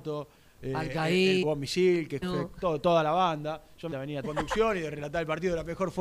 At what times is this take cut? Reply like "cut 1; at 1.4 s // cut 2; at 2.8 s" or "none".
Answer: cut 1; at 1.4 s // cut 2; at 2.2 s // cut 3; at 3.9 s // cut 4; at 4.2 s